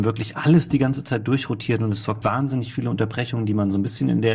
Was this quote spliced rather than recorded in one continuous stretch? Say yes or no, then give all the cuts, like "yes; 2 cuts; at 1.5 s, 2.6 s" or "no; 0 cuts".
yes; 1 cut; at 2.2 s